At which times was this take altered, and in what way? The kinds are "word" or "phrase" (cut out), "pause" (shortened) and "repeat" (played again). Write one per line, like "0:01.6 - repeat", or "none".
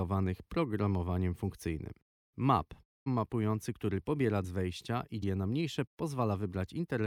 0:03.1 - word
0:04.4 - word
0:05.2 - word
0:05.9 - word

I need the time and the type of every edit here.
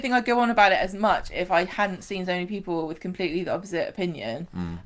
none

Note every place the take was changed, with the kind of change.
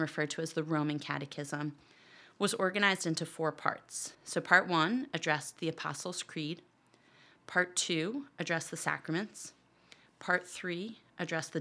0:04.1 - pause

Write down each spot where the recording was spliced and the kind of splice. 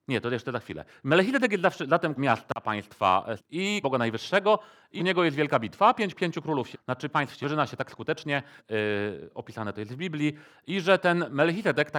0:02.2 - word
0:03.4 - word
0:03.8 - word
0:05.0 - word
0:06.1 - word
0:06.7 - word
0:07.1 - word
0:07.4 - word
0:08.6 - word

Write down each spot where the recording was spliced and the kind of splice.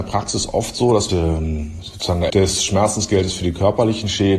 0:01.1 - phrase
0:02.3 - word

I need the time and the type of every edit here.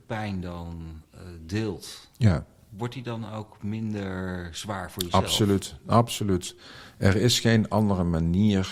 none

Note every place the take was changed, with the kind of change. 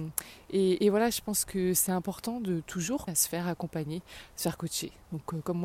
0:03.1 - word

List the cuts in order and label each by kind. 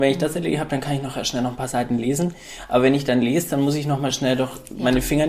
none

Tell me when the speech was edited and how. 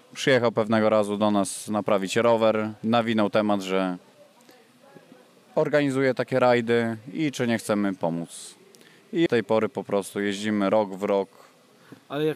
0:02.8 - pause
0:09.3 - word

